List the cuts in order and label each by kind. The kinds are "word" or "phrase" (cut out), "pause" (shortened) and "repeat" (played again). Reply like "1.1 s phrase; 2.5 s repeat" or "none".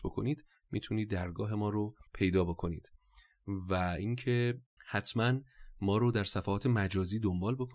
2.1 s pause; 4.8 s pause